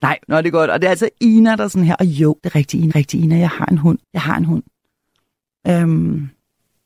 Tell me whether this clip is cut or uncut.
cut